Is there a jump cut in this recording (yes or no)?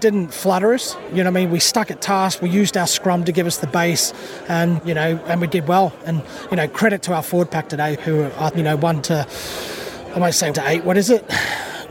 yes